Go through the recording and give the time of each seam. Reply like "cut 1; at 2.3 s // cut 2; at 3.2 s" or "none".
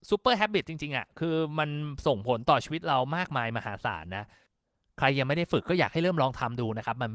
none